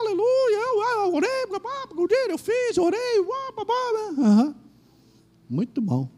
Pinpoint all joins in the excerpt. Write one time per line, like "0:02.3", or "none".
0:05.2